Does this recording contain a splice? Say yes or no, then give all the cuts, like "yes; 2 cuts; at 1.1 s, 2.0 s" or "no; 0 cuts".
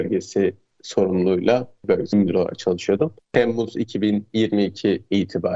yes; 1 cut; at 2.1 s